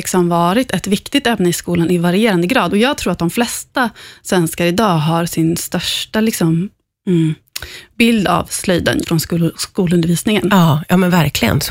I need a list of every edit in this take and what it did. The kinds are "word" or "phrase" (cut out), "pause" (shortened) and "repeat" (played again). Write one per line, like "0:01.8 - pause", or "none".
0:09.0 - word